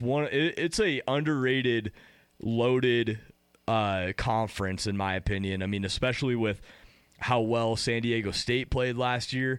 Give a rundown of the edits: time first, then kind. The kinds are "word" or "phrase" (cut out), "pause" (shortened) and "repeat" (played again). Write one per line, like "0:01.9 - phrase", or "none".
none